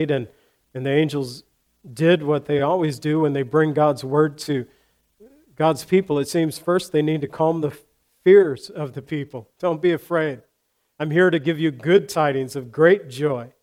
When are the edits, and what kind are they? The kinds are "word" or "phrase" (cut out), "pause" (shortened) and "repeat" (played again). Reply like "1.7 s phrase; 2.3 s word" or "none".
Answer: none